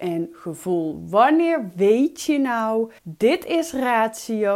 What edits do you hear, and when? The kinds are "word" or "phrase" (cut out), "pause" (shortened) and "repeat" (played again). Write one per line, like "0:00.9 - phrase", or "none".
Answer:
0:03.0 - pause